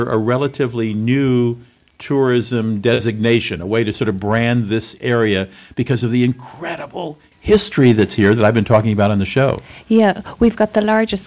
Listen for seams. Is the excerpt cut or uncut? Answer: uncut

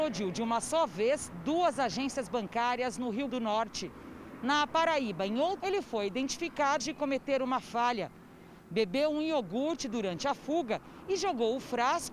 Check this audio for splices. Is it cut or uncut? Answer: cut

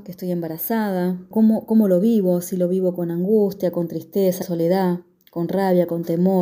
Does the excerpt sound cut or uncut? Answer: cut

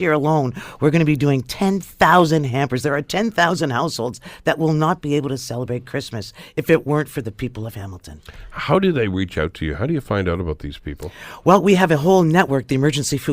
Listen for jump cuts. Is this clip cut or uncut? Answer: uncut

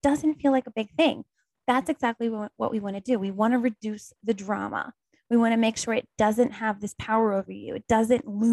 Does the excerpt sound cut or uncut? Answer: uncut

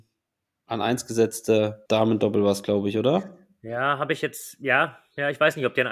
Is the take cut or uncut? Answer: cut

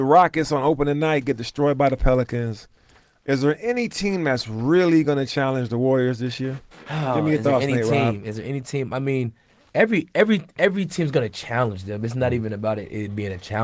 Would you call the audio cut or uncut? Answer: uncut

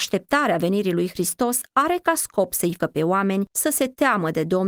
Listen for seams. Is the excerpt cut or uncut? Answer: cut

